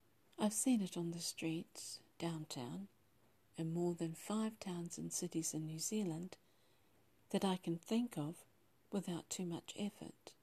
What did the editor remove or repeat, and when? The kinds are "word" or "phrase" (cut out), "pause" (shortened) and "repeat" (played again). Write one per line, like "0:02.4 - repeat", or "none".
none